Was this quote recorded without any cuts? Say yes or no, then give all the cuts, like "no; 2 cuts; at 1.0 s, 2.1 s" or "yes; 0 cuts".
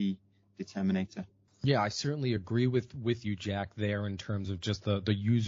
yes; 0 cuts